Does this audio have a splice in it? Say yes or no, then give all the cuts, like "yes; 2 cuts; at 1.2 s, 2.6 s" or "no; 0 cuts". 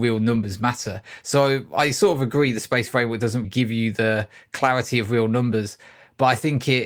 yes; 1 cut; at 3.4 s